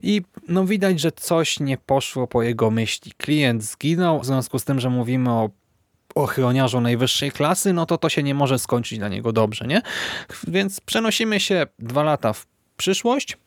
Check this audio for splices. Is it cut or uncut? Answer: cut